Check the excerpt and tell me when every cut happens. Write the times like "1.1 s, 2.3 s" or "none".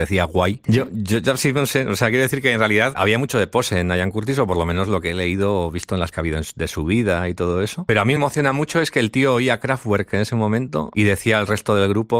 2.9 s, 6.1 s, 8.2 s